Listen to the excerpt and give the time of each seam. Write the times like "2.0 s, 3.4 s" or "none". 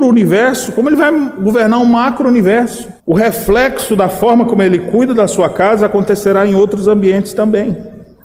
3.0 s